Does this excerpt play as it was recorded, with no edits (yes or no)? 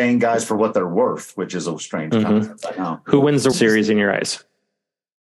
no